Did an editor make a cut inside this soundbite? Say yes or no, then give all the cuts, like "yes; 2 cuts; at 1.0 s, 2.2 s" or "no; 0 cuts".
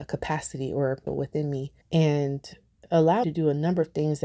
yes; 3 cuts; at 1.1 s, 1.8 s, 3.2 s